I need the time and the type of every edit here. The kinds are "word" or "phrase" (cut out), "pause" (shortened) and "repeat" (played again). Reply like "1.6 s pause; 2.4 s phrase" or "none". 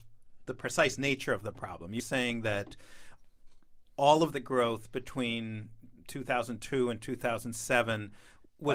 2.0 s word; 4.3 s phrase